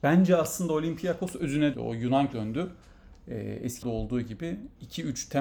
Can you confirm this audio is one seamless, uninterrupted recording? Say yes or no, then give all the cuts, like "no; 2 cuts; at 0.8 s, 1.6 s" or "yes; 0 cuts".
no; 3 cuts; at 1.7 s, 2.3 s, 3.8 s